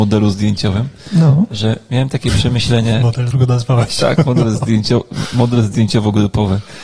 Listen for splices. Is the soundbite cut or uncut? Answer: cut